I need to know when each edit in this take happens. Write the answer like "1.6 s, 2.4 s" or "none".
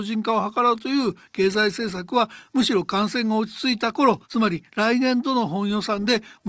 4.2 s